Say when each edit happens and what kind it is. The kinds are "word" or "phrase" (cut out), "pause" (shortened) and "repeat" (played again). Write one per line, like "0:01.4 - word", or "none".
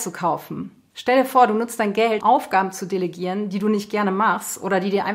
0:02.2 - word